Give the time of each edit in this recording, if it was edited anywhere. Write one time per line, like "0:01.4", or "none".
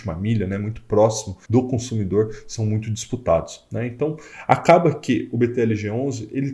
0:01.4